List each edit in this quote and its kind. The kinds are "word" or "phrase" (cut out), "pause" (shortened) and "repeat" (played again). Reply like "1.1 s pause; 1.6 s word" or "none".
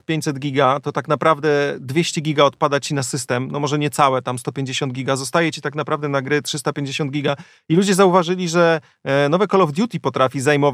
none